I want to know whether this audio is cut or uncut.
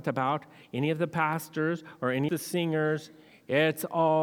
cut